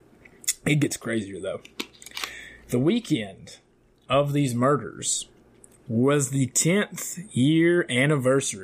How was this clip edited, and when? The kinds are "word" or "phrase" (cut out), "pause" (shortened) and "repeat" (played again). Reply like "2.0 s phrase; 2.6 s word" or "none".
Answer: none